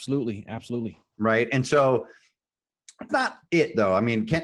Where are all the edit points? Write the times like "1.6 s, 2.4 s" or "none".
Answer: 3.1 s